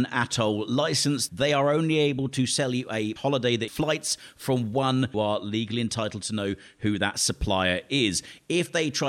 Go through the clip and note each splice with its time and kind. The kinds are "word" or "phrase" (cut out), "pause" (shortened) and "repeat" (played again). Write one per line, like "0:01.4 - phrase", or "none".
0:01.3 - word
0:03.2 - word
0:03.7 - word
0:05.1 - phrase